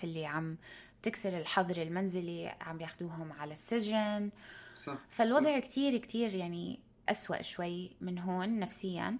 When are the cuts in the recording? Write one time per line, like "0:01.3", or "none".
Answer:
none